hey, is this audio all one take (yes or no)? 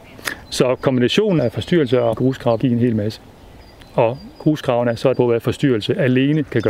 no